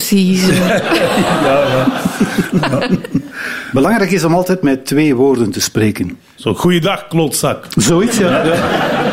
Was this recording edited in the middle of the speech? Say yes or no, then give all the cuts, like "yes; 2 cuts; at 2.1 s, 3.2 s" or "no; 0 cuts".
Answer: no; 0 cuts